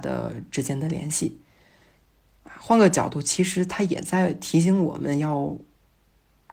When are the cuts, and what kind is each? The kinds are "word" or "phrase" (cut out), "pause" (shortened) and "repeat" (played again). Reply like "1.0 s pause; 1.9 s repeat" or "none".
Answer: none